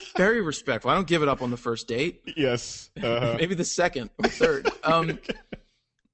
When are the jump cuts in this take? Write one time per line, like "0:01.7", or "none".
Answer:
none